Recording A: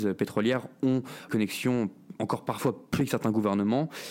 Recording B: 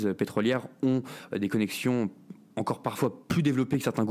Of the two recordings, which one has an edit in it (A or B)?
A